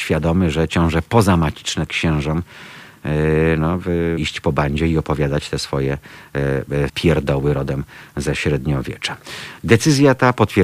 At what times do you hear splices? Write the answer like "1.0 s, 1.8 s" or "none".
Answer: 1.9 s, 4.2 s, 6.9 s